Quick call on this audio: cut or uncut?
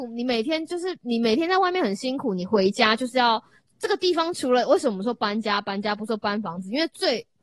uncut